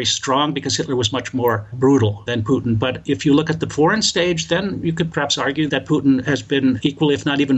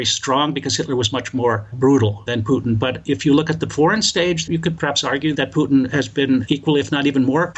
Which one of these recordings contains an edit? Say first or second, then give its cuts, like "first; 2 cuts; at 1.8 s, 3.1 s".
second; 1 cut; at 4.5 s